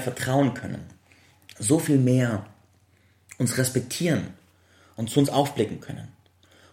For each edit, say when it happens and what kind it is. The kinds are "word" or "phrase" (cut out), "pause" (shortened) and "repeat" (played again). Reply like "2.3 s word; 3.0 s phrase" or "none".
none